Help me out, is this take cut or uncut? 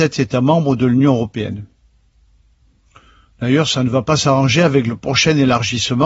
uncut